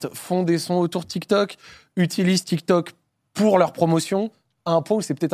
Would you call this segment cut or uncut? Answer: uncut